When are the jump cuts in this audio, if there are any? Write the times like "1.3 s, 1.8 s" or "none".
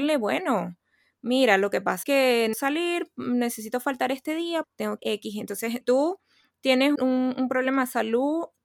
2.0 s, 2.5 s, 4.6 s, 5.0 s, 5.8 s, 7.0 s